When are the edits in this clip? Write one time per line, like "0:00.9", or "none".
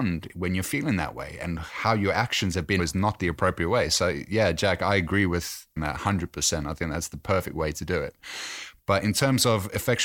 0:02.8
0:05.8